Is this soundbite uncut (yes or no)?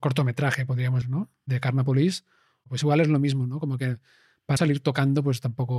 no